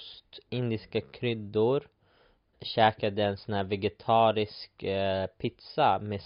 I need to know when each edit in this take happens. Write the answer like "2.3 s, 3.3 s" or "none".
2.5 s